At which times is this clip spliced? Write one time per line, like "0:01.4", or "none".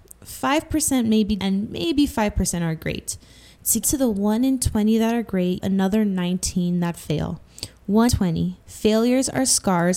0:01.4
0:03.8
0:05.6
0:08.1
0:08.6